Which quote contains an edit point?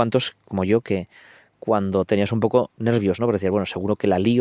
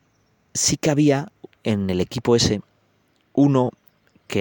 first; 1 cut; at 2.1 s

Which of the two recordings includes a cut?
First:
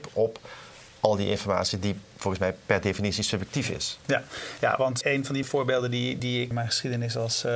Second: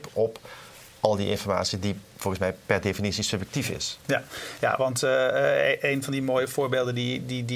first; 4 cuts; at 5.0 s, 5.4 s, 6.2 s, 6.5 s

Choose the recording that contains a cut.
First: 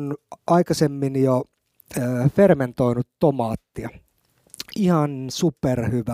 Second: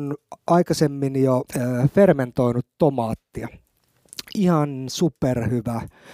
second; 1 cut; at 1.5 s

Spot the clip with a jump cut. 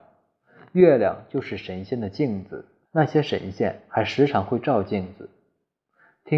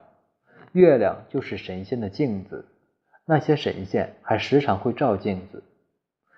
first; 1 cut; at 2.9 s

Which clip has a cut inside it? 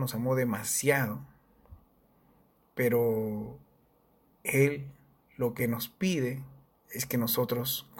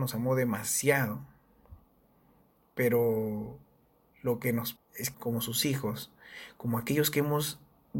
second; 3 cuts; at 4.1 s, 4.8 s, 5.1 s

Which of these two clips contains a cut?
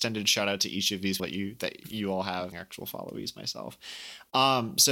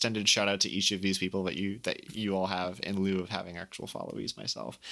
first; 2 cuts; at 1.2 s, 2.5 s

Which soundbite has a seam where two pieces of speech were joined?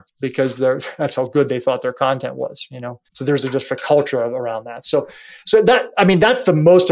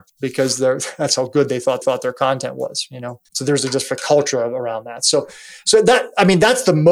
second; 1 cut; at 1.8 s

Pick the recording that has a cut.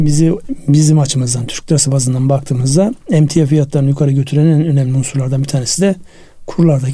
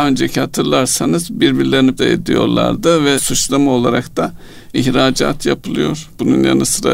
second; 3 cuts; at 2.0 s, 3.2 s, 4.7 s

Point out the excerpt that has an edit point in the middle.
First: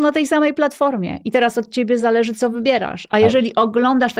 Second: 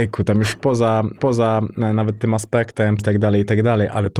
second; 2 cuts; at 1.2 s, 3.0 s

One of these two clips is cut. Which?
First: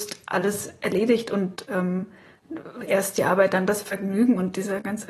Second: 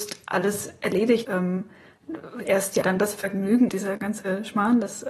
second; 3 cuts; at 1.2 s, 2.8 s, 3.7 s

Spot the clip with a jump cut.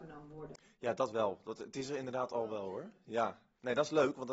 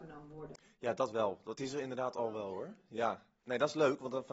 second; 1 cut; at 1.5 s

